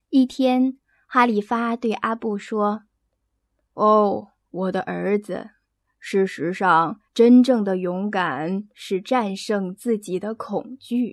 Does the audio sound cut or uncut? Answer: cut